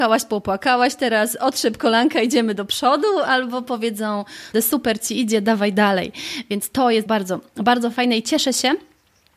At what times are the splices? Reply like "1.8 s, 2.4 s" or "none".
4.5 s, 7.1 s